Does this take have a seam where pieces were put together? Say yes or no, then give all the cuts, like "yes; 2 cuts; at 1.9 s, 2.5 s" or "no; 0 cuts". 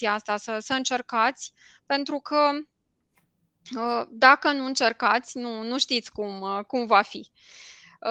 no; 0 cuts